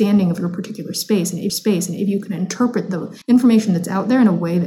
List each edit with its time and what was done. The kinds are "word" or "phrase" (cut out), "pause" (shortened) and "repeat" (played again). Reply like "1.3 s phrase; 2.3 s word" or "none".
1.5 s repeat; 3.2 s pause